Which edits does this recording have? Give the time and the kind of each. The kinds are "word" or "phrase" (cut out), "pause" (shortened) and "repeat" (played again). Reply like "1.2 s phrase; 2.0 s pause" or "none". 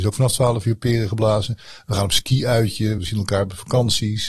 3.0 s word